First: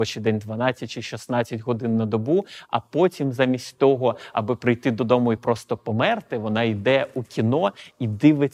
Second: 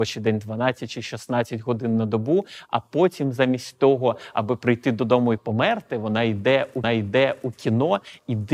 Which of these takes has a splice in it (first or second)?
second